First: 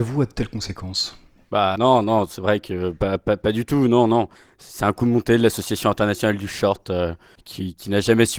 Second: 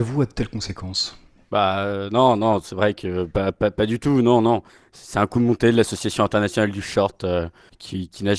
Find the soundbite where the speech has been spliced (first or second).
first